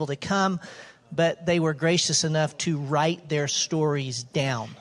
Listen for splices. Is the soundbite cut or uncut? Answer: uncut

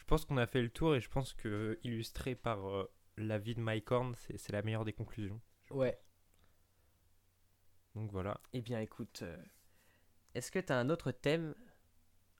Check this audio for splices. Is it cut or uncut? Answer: uncut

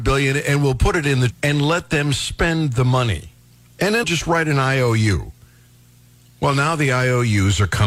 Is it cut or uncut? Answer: cut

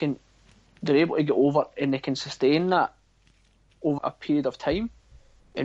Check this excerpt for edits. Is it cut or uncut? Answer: cut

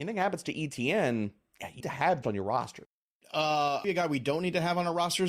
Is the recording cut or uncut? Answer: cut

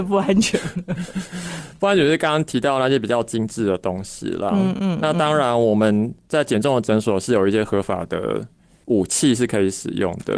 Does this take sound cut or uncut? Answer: uncut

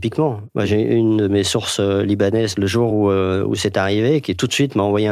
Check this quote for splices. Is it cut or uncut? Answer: uncut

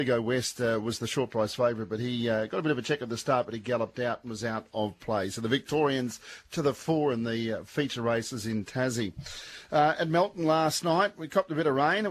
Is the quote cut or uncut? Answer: uncut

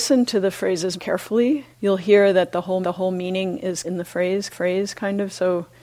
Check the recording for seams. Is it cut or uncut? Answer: cut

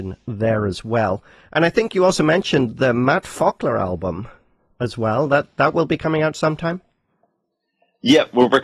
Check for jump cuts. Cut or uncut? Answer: uncut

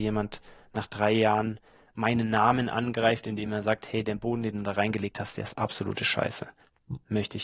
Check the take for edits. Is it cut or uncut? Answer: uncut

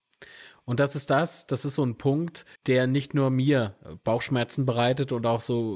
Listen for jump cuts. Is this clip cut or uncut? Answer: cut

